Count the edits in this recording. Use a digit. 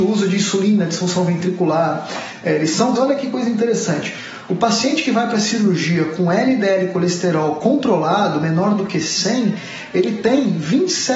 1